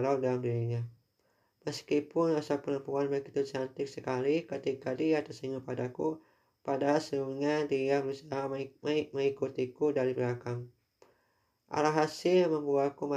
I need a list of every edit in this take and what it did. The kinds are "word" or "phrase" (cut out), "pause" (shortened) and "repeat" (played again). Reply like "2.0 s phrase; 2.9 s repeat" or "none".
none